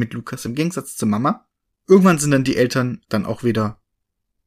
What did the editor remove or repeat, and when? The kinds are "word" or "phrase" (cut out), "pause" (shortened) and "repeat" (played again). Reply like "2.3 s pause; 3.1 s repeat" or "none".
1.6 s pause; 3.0 s word